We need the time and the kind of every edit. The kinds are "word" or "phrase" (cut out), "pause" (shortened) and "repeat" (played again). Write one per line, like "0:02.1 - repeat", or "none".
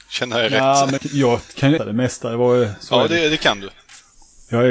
0:01.0 - word
0:01.8 - word